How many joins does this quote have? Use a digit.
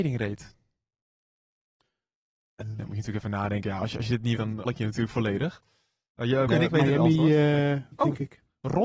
5